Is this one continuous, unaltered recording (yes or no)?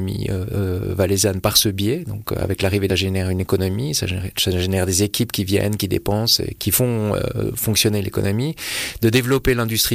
no